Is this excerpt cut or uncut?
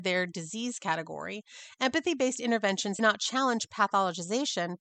cut